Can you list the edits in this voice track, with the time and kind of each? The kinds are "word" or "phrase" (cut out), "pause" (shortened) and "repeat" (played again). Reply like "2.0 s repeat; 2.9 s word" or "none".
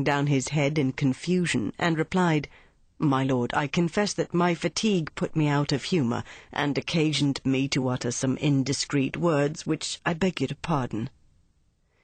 none